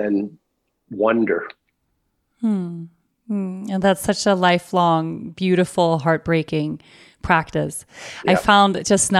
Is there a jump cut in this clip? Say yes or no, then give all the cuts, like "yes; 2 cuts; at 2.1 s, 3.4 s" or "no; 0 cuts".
no; 0 cuts